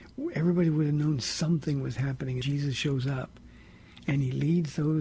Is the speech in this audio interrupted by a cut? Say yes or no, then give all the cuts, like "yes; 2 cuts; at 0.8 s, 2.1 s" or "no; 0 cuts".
yes; 1 cut; at 2.4 s